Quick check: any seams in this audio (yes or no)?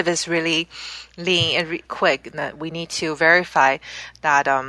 yes